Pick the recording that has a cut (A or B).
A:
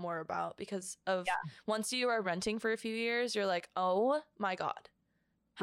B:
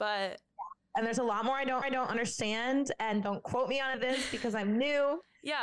B